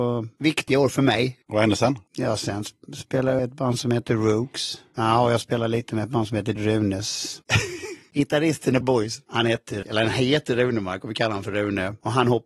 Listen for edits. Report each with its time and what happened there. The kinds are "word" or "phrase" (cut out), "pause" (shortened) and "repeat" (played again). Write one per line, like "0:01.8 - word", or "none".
0:03.4 - word
0:06.6 - word
0:08.8 - word
0:09.8 - word